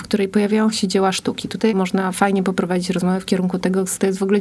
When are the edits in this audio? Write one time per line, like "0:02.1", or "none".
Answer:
none